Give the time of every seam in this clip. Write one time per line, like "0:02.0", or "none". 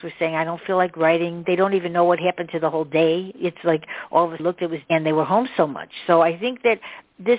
0:04.4
0:04.8